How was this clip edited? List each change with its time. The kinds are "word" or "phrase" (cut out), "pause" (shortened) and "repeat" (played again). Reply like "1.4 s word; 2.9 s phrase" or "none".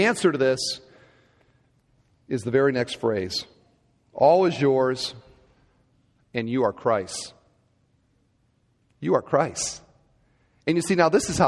none